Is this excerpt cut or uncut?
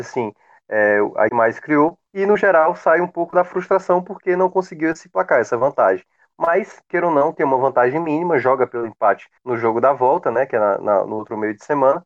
cut